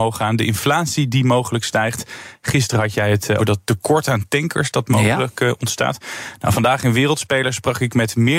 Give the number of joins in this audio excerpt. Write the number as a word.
one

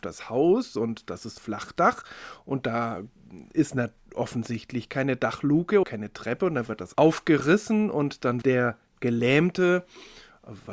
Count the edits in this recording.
four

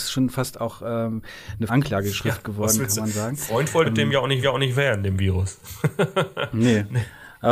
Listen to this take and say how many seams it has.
three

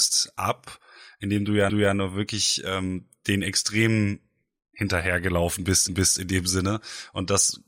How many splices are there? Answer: two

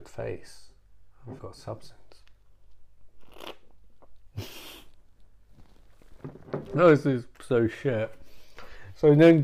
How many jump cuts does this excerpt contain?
two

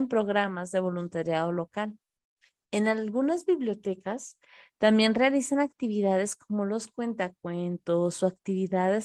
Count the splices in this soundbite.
zero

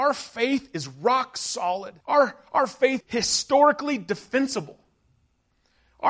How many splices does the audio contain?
two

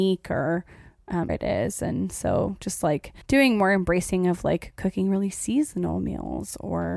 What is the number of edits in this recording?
two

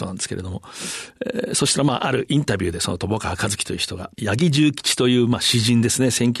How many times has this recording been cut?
one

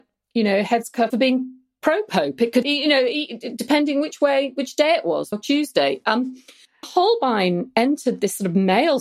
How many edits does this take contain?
four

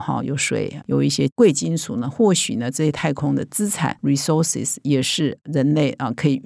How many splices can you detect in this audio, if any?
one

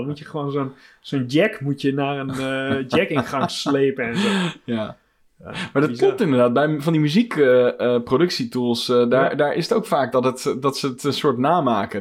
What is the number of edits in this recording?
zero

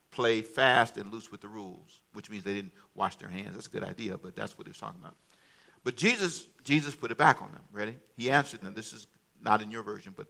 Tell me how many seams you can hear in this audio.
one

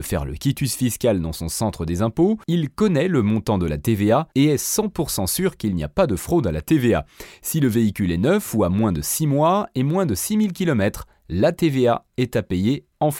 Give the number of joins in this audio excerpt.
two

